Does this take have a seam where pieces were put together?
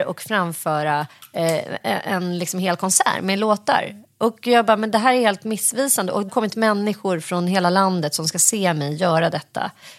yes; 2 cuts; at 1.8 s, 6.3 s

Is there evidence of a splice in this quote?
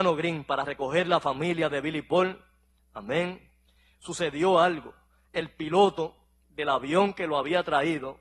no; 0 cuts

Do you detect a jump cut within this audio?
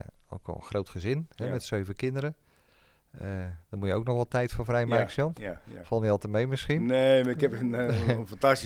no; 0 cuts

